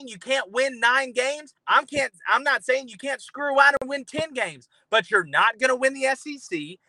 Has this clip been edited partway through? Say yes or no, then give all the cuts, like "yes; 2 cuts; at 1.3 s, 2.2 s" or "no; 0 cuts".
yes; 1 cut; at 1.6 s